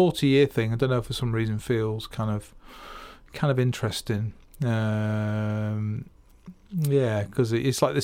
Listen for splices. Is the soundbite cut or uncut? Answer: uncut